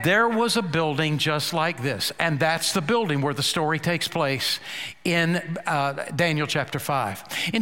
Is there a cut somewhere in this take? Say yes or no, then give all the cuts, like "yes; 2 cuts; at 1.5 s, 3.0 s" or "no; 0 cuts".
no; 0 cuts